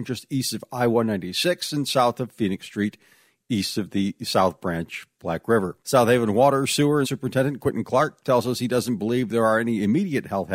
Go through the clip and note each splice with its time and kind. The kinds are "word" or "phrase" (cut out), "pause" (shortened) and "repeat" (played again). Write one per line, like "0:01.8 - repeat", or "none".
0:05.8 - pause
0:07.0 - phrase